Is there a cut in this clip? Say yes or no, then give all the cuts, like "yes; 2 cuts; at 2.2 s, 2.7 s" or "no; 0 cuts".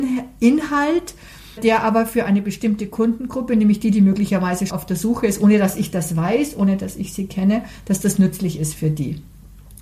yes; 2 cuts; at 1.6 s, 4.7 s